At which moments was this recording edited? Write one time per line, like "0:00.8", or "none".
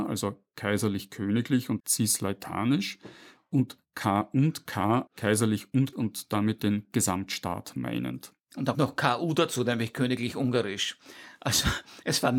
0:01.8
0:05.1
0:05.9
0:08.7